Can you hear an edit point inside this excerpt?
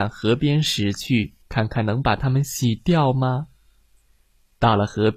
yes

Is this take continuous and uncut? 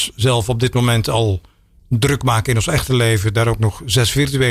yes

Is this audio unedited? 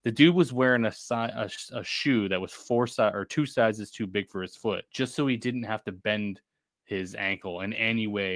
no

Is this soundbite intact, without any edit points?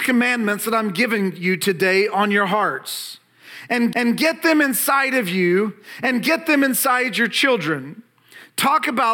no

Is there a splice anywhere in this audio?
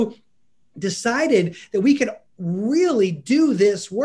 no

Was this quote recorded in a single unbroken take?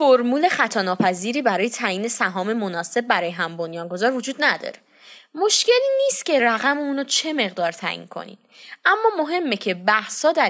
yes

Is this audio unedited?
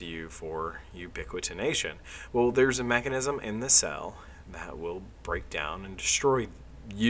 yes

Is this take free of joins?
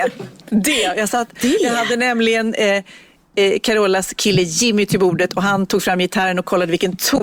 yes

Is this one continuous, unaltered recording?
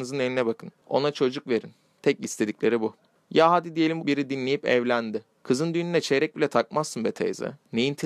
no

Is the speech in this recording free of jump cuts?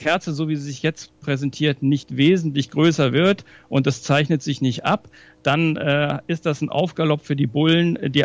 yes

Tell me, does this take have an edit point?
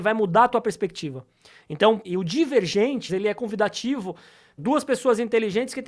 yes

